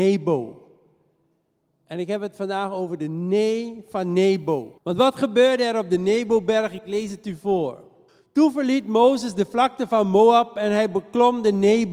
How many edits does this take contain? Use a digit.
2